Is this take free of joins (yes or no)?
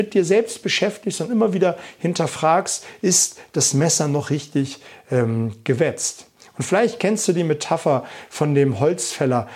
yes